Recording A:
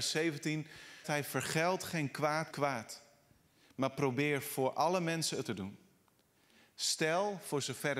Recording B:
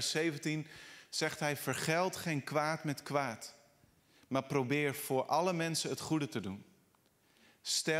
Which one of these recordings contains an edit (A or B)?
A